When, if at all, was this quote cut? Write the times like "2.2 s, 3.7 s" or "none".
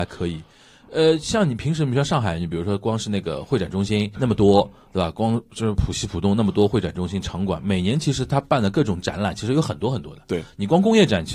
4.1 s

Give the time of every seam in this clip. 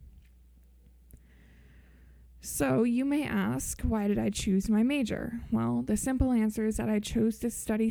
none

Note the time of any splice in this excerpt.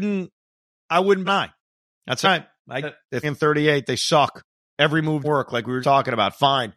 1.2 s, 2.2 s, 2.8 s, 3.2 s, 5.2 s, 5.8 s

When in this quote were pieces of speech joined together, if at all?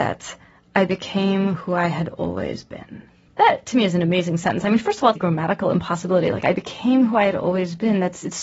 3.3 s, 5.2 s

